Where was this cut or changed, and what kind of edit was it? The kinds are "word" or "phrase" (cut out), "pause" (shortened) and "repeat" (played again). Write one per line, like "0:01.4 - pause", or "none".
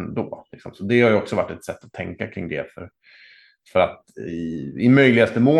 none